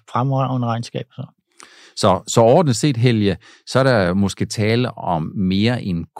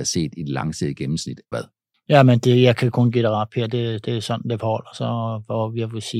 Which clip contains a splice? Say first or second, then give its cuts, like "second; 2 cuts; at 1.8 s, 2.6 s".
second; 1 cut; at 1.5 s